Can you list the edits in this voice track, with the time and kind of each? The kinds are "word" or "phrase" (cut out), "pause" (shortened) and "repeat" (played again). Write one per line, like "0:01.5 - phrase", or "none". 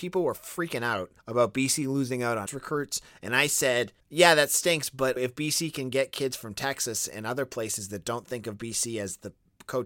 0:01.2 - pause
0:02.5 - word
0:04.0 - pause
0:05.2 - word